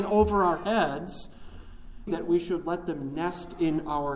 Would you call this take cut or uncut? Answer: cut